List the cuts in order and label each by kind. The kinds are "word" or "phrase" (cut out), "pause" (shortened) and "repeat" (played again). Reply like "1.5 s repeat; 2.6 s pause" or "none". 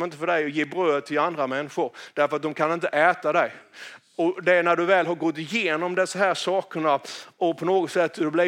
none